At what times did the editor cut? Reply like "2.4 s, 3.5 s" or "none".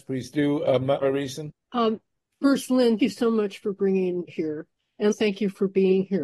1.0 s, 3.0 s, 4.3 s, 5.1 s